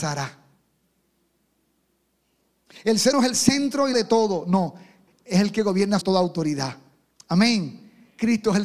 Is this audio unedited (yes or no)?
no